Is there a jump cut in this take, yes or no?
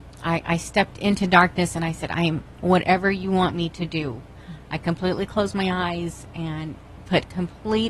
no